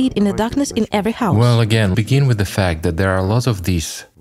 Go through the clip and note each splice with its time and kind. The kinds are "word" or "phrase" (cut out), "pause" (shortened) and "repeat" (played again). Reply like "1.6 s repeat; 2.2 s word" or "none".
1.9 s word